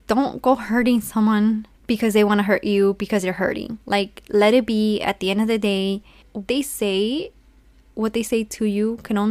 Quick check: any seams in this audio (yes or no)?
yes